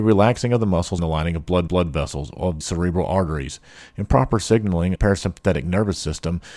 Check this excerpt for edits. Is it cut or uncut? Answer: cut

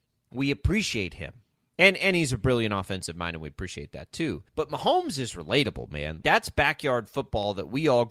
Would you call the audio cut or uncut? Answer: cut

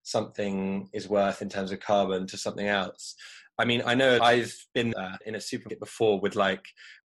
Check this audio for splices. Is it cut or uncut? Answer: uncut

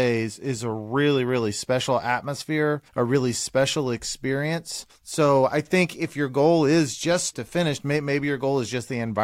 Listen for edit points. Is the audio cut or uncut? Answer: cut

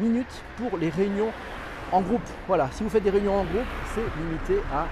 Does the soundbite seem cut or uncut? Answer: uncut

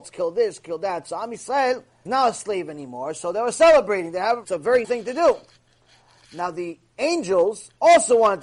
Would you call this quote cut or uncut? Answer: cut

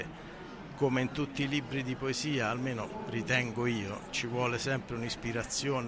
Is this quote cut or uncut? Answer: uncut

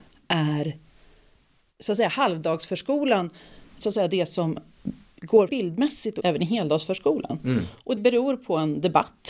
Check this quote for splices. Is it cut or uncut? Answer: cut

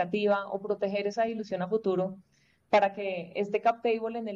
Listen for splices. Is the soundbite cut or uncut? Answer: uncut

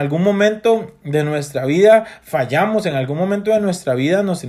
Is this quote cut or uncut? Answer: uncut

